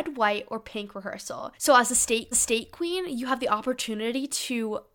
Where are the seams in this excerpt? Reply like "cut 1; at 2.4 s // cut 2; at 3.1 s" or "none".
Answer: cut 1; at 1.6 s // cut 2; at 2.3 s